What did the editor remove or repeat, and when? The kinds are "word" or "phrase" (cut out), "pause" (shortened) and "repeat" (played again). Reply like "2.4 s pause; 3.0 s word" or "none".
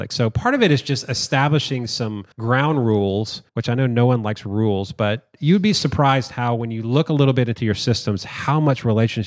2.3 s pause; 3.5 s pause